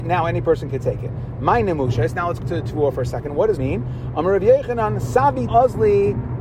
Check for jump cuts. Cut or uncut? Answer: cut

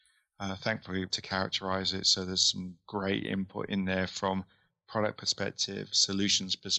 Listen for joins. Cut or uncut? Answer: cut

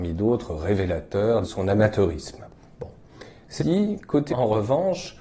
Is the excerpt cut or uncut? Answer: cut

